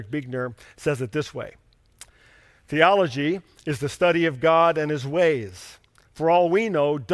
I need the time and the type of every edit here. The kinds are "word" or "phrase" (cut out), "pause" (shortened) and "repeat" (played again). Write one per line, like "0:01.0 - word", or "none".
none